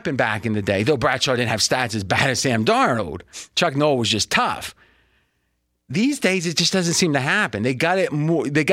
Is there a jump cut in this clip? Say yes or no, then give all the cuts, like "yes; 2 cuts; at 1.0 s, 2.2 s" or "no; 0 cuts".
no; 0 cuts